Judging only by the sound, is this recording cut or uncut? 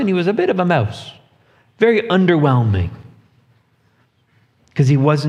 uncut